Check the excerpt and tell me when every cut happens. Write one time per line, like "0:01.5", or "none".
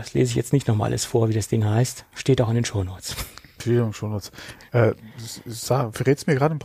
none